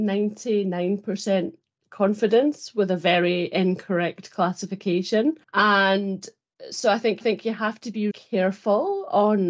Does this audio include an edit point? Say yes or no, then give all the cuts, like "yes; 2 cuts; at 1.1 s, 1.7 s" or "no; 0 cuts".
yes; 3 cuts; at 5.4 s, 7.2 s, 8.1 s